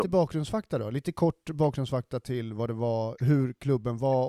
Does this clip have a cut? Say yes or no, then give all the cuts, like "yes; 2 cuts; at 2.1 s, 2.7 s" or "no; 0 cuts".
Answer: no; 0 cuts